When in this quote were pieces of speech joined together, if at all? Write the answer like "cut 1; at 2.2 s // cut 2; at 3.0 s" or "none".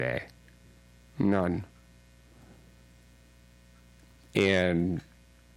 none

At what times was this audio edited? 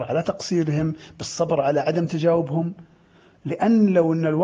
none

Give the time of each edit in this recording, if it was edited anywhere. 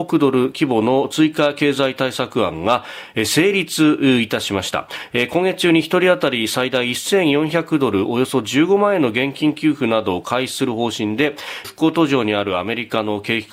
cut 1; at 11.6 s

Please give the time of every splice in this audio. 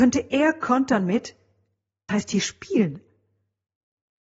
cut 1; at 2.1 s

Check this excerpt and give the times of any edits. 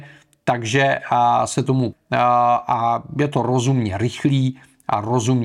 cut 1; at 1.9 s

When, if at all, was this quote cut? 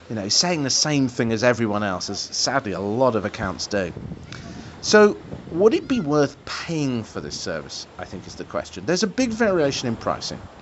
none

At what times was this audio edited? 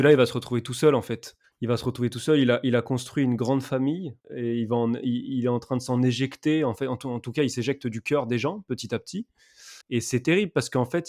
cut 1; at 1.4 s // cut 2; at 4.2 s // cut 3; at 9.8 s

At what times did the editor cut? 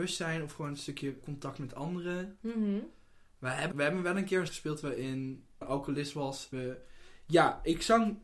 cut 1; at 1.2 s // cut 2; at 3.7 s // cut 3; at 4.5 s // cut 4; at 5.6 s // cut 5; at 6.5 s

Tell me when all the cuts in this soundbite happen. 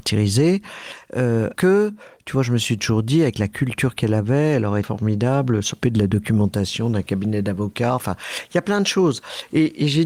cut 1; at 1.5 s // cut 2; at 4.8 s // cut 3; at 5.8 s

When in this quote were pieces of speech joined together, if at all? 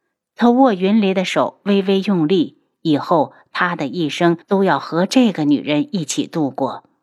cut 1; at 4.4 s

